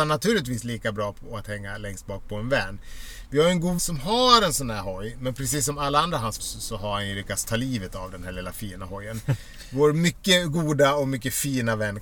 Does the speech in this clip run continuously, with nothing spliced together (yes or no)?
no